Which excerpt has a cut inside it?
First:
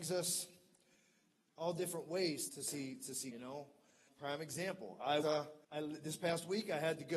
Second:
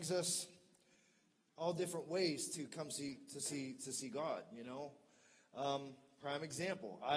first; 5 cuts; at 2.5 s, 3.3 s, 4.1 s, 5.2 s, 5.6 s

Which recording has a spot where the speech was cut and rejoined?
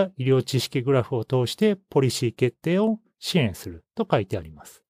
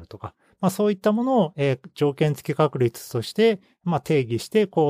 first; 1 cut; at 3.9 s

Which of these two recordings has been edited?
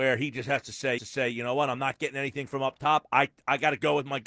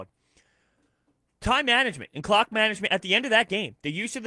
first; 1 cut; at 1.0 s

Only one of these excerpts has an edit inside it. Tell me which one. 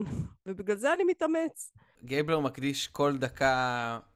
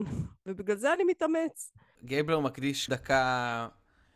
second; 1 cut; at 2.9 s

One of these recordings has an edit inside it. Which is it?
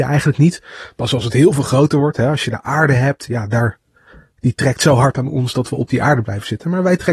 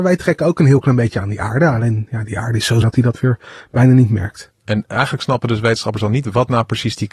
second; 1 cut; at 2.8 s

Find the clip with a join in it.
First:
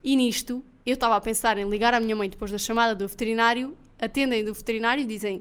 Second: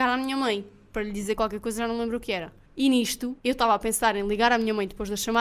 second; 2 cuts; at 2.7 s, 3.4 s

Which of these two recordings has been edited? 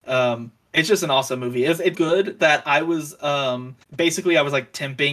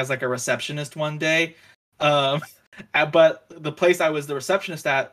first; 2 cuts; at 1.9 s, 3.8 s

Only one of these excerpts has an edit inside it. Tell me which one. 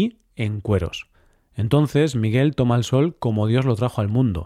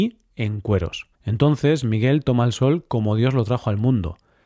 second; 1 cut; at 1.1 s

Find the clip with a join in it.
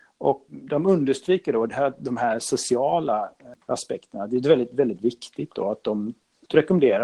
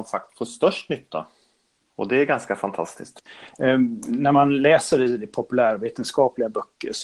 first; 1 cut; at 3.6 s

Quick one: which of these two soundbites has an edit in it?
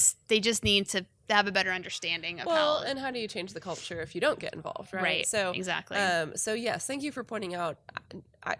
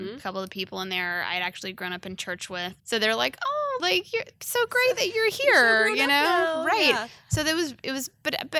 second; 2 cuts; at 2.8 s, 3.8 s

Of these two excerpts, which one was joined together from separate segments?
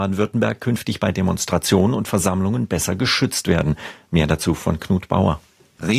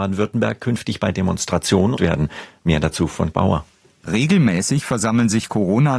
second; 2 cuts; at 2.0 s, 3.3 s

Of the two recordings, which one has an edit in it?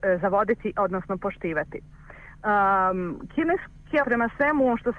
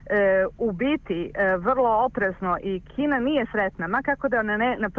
first; 1 cut; at 4.0 s

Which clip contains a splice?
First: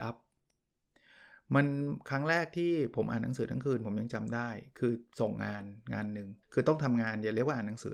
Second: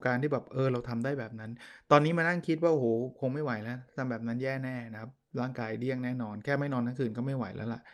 first; 1 cut; at 6.4 s

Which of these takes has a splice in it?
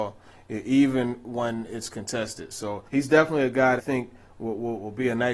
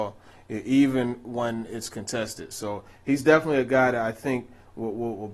first; 2 cuts; at 2.9 s, 3.8 s

